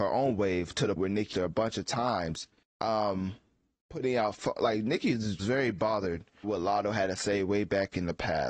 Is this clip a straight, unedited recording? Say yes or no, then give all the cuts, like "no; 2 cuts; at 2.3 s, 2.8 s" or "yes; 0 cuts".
no; 6 cuts; at 1.0 s, 1.3 s, 2.6 s, 4.3 s, 5.4 s, 6.4 s